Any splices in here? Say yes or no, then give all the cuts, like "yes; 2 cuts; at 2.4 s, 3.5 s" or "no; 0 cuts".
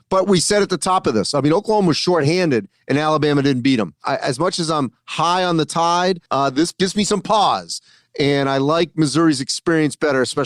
yes; 1 cut; at 6.3 s